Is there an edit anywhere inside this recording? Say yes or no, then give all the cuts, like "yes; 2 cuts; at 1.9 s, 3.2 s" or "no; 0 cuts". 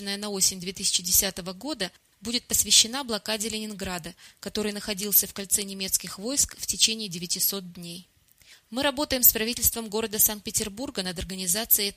no; 0 cuts